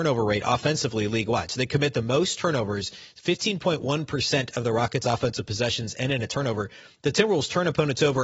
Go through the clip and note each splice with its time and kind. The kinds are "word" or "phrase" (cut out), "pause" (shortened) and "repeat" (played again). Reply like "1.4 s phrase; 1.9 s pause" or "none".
none